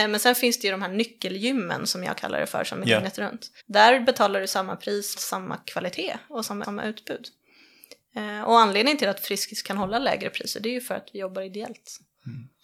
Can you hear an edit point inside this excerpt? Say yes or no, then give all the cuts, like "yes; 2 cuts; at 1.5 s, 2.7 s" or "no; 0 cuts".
yes; 4 cuts; at 2.8 s, 3.6 s, 5.2 s, 6.6 s